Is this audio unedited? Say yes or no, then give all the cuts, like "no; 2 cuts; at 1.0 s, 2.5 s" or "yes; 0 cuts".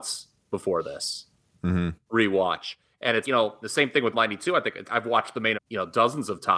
no; 5 cuts; at 3.2 s, 3.6 s, 4.1 s, 4.8 s, 5.5 s